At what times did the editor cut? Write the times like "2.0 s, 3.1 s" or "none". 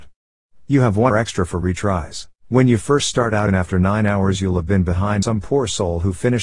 1.1 s, 2.4 s, 3.5 s, 5.2 s